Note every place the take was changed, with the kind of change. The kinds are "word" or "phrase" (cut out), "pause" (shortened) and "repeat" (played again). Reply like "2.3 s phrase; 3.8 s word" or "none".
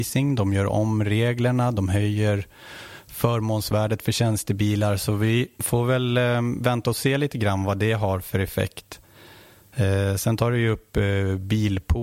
5.5 s pause